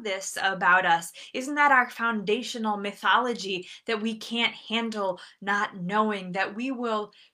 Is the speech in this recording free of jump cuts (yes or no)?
yes